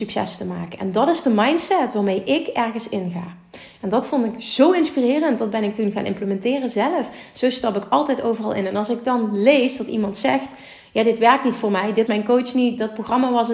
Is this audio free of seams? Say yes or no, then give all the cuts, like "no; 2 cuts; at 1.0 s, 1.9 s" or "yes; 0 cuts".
no; 1 cut; at 12.1 s